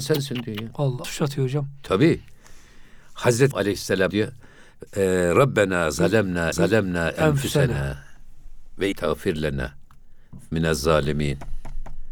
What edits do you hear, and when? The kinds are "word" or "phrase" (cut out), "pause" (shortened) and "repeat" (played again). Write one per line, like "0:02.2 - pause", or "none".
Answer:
0:01.0 - word
0:03.5 - word
0:04.1 - word
0:06.5 - repeat
0:08.9 - word
0:10.5 - word